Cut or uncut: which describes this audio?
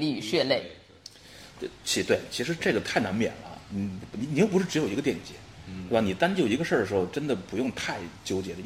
uncut